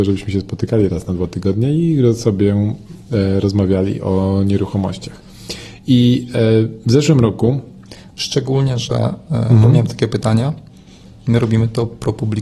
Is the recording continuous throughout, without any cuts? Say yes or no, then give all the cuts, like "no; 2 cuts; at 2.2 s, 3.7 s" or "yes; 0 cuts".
yes; 0 cuts